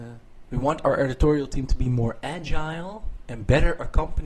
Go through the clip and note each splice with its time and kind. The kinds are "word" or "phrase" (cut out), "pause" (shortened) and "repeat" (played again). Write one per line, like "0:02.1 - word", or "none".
none